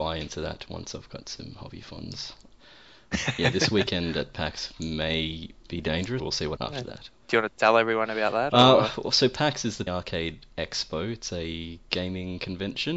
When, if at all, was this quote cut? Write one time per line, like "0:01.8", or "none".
0:06.2
0:06.6
0:09.9